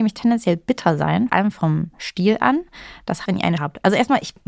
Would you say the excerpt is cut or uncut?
cut